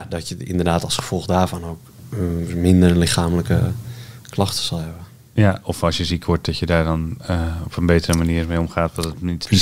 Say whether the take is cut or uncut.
uncut